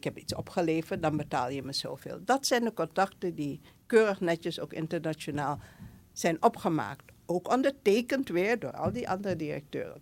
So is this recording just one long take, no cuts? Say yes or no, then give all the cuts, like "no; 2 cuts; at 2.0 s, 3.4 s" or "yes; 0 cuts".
yes; 0 cuts